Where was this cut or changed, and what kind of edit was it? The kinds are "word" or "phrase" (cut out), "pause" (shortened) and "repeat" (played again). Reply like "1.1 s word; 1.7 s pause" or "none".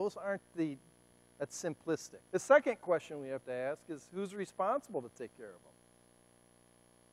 2.3 s pause